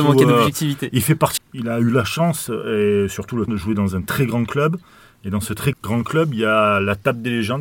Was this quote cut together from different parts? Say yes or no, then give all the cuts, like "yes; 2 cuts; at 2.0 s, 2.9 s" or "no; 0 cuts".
yes; 3 cuts; at 1.4 s, 3.5 s, 5.7 s